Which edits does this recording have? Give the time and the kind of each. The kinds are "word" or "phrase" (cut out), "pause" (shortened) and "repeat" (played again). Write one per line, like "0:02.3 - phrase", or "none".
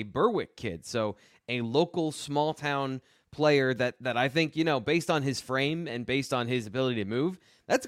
none